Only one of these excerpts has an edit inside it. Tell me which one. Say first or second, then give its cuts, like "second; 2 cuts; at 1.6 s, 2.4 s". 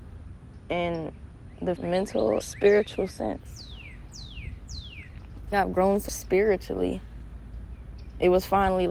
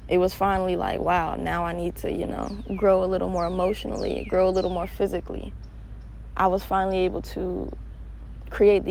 first; 4 cuts; at 1.8 s, 2.4 s, 5.5 s, 6.1 s